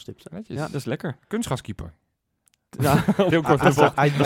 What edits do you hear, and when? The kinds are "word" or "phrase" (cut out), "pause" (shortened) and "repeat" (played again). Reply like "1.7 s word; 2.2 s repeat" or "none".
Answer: 1.2 s pause; 3.3 s phrase

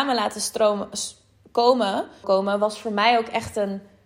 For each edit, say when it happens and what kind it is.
2.2 s word

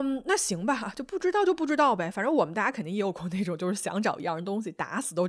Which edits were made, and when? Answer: none

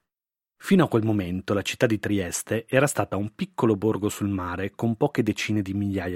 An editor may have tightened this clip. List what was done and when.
none

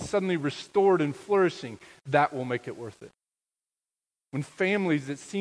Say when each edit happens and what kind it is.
none

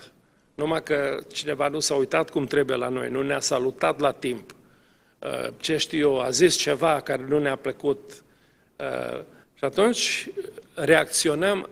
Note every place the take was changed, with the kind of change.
9.4 s pause

